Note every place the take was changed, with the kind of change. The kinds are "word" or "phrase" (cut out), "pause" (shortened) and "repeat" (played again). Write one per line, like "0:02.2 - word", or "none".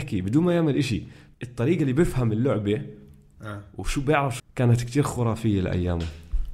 0:01.3 - word
0:04.4 - word